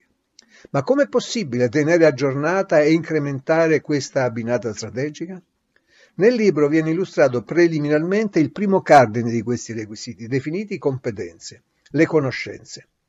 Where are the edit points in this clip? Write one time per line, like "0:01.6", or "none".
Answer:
none